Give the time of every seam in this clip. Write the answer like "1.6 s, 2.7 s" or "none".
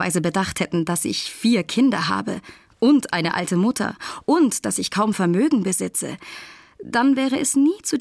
none